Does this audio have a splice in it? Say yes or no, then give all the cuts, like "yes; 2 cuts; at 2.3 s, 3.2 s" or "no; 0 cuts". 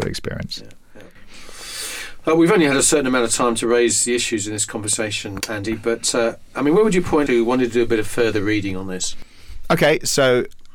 yes; 2 cuts; at 5.4 s, 7.3 s